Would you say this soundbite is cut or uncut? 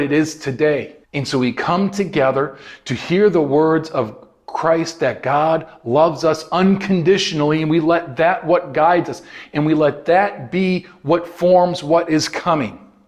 cut